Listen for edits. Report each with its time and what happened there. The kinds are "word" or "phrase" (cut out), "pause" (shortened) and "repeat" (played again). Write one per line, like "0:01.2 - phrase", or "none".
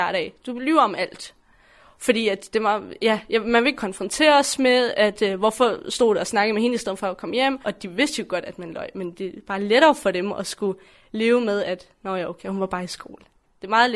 none